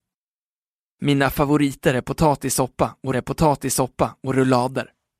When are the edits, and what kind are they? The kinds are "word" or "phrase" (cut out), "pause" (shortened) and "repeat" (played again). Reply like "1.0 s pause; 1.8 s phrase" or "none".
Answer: 3.1 s repeat